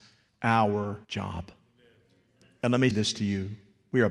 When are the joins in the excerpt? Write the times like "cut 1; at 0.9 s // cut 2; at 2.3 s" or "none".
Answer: cut 1; at 1.0 s // cut 2; at 2.9 s